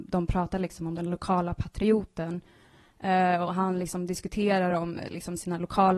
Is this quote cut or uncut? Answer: uncut